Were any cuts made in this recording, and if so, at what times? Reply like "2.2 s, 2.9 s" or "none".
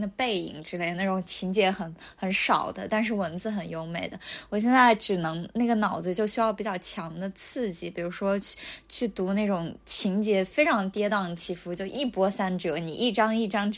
none